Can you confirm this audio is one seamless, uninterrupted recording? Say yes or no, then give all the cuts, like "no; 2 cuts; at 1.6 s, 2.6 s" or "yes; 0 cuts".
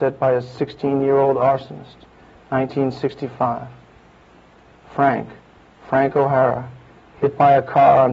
yes; 0 cuts